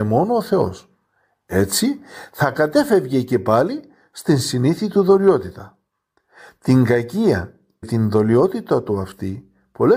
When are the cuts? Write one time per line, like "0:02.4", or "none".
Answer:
0:07.8